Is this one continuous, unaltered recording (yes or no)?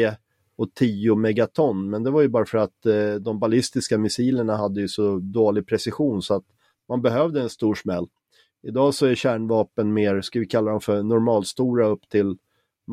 yes